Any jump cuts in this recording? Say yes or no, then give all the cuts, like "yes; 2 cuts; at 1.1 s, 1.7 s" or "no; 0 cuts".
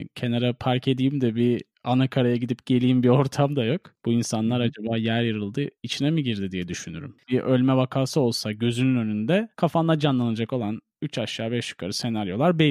no; 0 cuts